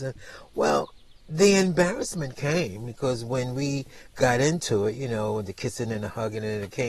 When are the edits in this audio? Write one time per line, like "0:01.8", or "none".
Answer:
0:01.2